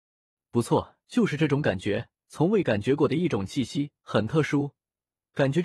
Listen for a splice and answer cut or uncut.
cut